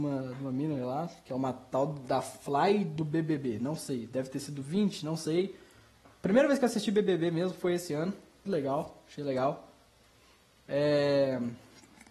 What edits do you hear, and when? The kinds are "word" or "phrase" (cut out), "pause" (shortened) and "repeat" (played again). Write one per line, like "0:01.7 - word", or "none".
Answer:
0:08.5 - word